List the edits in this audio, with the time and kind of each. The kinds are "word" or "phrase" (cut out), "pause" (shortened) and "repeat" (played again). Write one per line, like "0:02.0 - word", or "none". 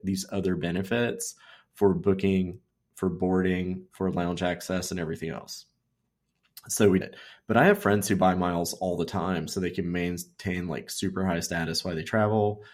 0:07.0 - word